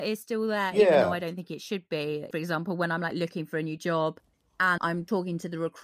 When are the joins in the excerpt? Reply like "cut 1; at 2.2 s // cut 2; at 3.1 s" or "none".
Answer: none